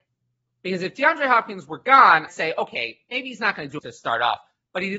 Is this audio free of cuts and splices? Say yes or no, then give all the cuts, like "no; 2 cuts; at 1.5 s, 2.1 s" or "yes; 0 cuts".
no; 2 cuts; at 2.3 s, 3.8 s